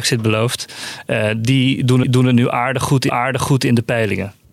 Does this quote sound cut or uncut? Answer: cut